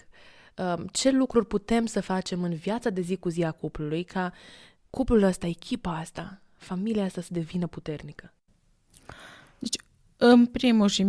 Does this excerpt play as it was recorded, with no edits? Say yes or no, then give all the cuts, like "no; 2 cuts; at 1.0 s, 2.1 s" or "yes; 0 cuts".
yes; 0 cuts